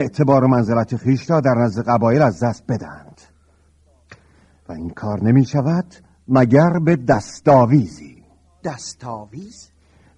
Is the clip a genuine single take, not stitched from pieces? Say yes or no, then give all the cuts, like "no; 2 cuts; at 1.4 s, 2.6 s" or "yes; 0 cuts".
yes; 0 cuts